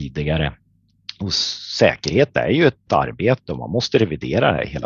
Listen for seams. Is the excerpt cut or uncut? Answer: cut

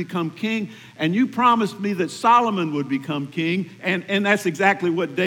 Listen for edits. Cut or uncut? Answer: uncut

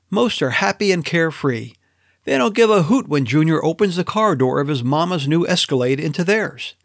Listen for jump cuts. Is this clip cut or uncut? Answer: uncut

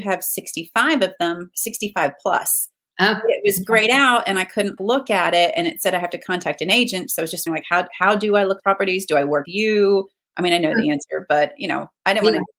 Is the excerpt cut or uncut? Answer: cut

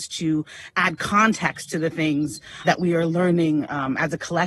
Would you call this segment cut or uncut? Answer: cut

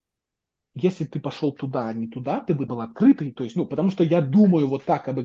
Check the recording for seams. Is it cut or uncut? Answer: cut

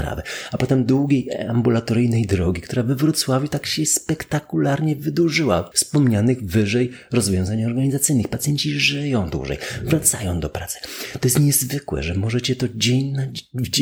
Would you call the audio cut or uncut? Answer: cut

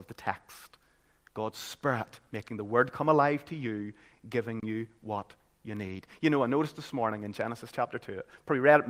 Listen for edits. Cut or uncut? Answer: uncut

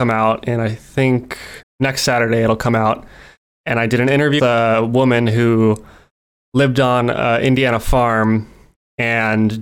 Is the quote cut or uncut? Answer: cut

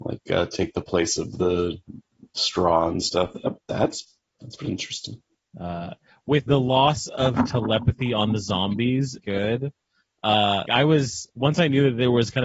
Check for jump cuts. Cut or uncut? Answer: cut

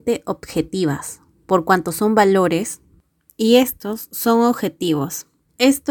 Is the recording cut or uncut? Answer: uncut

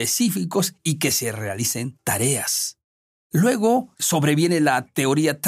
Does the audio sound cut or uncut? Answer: uncut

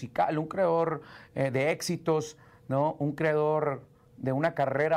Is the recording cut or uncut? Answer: uncut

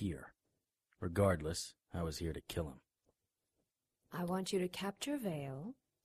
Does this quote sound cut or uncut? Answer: uncut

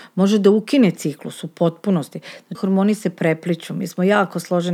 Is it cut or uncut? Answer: cut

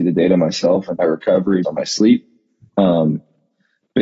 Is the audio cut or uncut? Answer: cut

